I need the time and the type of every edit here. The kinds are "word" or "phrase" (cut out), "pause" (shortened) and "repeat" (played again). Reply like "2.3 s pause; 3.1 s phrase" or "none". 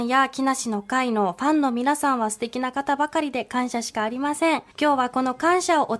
4.7 s pause